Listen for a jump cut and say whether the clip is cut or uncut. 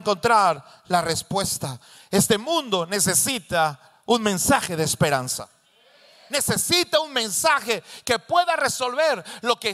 uncut